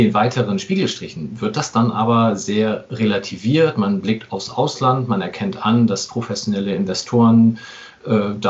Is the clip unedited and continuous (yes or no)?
yes